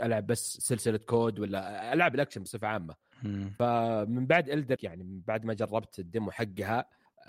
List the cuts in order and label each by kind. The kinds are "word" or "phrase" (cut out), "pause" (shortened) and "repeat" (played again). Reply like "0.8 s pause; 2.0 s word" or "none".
4.8 s word